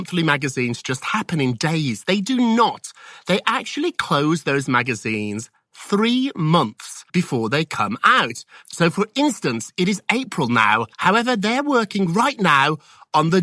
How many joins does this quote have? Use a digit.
2